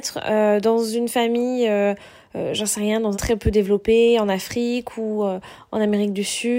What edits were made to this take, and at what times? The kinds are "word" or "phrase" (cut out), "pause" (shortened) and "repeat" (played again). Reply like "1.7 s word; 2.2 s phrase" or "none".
3.1 s phrase